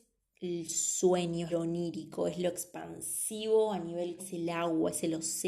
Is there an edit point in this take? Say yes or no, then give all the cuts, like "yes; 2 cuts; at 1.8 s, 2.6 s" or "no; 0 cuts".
yes; 2 cuts; at 1.5 s, 4.2 s